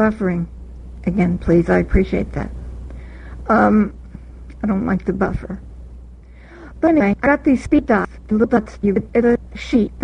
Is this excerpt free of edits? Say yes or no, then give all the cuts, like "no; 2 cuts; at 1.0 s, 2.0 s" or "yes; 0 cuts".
yes; 0 cuts